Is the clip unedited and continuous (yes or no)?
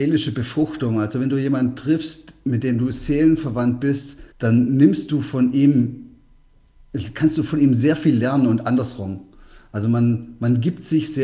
no